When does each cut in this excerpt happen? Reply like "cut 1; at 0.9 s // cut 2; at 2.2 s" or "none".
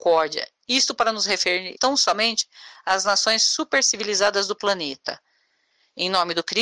cut 1; at 1.8 s